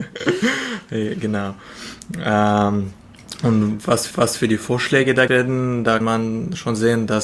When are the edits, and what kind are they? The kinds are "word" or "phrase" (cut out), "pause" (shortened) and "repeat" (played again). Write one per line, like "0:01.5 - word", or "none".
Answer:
0:04.1 - repeat
0:05.3 - word
0:06.0 - word